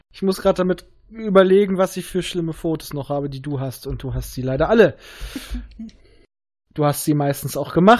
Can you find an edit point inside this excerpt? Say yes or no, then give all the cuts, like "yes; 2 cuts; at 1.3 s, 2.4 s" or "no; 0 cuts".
no; 0 cuts